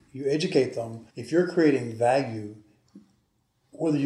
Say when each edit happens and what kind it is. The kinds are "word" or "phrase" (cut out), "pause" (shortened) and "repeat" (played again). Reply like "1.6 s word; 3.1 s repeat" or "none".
1.1 s pause